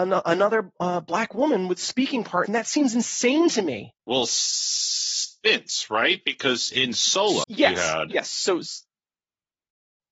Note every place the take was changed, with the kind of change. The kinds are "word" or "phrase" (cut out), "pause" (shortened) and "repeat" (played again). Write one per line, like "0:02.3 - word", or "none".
0:02.5 - phrase
0:04.0 - pause
0:06.7 - word
0:07.4 - word